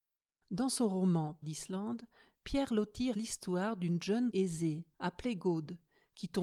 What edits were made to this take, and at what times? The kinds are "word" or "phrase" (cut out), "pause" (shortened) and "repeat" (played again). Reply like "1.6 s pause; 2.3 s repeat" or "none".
1.4 s word; 3.1 s word; 4.3 s word; 4.9 s pause